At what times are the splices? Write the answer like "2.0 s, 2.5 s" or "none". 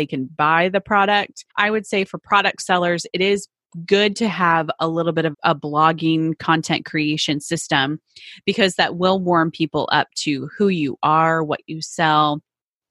1.5 s, 5.3 s